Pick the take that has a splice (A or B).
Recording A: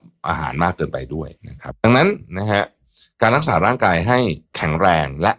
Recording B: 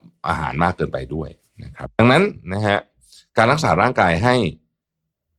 A